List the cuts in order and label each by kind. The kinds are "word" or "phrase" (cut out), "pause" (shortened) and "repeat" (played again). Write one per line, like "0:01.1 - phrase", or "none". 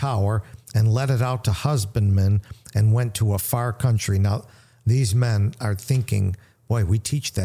none